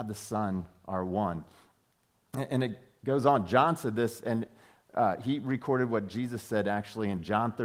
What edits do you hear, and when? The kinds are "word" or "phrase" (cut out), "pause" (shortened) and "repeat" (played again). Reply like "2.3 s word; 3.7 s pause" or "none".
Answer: none